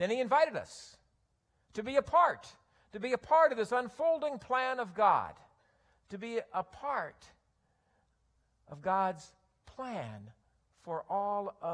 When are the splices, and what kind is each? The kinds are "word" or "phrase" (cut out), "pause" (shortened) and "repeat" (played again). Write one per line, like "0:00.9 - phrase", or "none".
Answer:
none